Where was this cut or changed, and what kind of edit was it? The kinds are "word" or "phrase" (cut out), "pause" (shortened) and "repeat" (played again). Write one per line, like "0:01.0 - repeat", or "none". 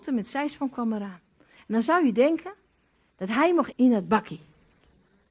0:03.7 - word